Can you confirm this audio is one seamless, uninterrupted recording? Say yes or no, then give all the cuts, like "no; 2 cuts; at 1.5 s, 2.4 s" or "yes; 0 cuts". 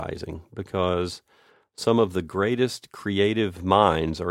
yes; 0 cuts